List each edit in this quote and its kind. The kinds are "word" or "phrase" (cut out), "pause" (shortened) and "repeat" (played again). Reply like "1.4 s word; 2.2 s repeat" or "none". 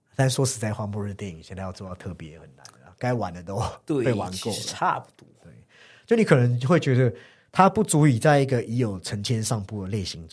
5.3 s pause